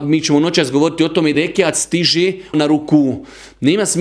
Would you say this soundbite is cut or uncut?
cut